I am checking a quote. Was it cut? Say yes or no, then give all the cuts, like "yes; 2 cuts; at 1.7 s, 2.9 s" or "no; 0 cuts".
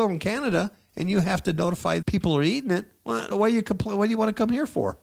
yes; 2 cuts; at 2.0 s, 3.3 s